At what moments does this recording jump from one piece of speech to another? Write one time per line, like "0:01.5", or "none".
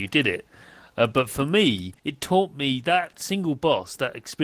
0:02.0

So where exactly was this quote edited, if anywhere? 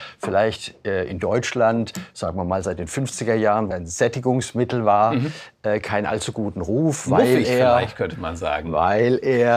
0:03.7

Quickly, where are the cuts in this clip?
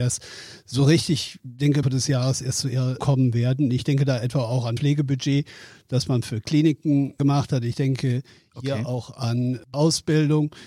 0:01.8
0:03.0
0:04.8
0:09.7

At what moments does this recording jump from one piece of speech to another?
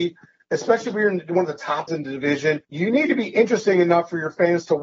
0:01.9
0:02.6

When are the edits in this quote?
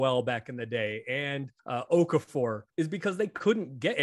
0:01.6
0:02.7

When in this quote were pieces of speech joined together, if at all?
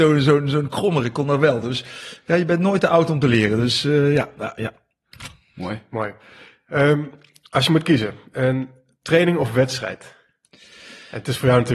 none

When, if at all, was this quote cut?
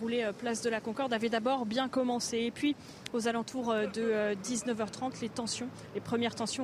none

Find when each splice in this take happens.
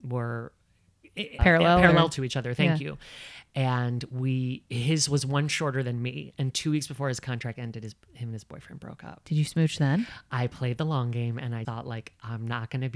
0:01.4
0:11.6

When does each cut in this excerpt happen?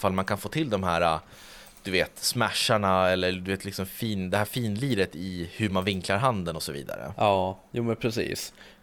none

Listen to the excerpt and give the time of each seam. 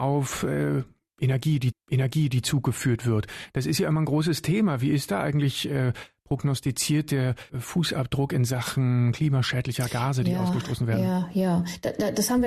0:01.7
0:07.5

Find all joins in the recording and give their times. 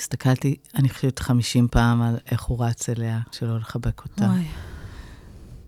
0:03.3

